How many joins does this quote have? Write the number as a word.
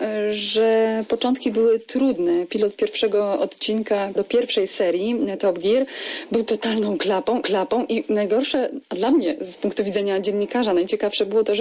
two